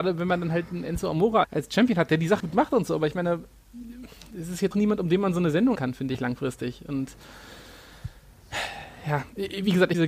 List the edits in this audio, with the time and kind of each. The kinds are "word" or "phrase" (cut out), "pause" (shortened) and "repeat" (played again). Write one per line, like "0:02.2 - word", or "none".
0:01.4 - word
0:02.4 - word
0:04.7 - word
0:05.7 - word